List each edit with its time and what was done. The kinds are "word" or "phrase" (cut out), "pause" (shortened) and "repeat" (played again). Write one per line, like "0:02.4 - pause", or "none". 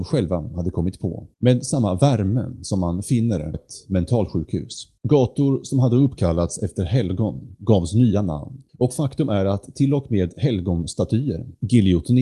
0:01.3 - pause
0:03.5 - word
0:05.0 - pause
0:08.7 - pause